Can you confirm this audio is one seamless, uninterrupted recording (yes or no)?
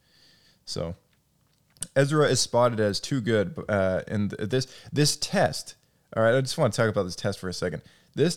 yes